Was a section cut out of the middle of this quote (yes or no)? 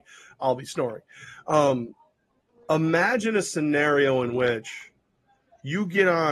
no